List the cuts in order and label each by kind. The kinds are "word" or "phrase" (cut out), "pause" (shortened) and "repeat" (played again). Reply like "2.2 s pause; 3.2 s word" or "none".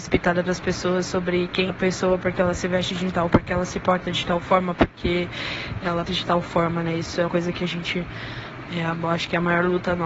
1.7 s word; 3.3 s word; 6.1 s word; 7.3 s word